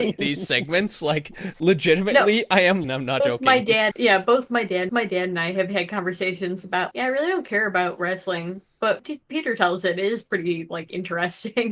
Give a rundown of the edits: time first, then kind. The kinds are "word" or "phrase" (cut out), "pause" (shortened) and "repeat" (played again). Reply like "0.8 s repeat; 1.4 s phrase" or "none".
2.8 s phrase; 3.2 s word; 3.9 s word; 4.9 s repeat; 6.9 s word; 9.0 s word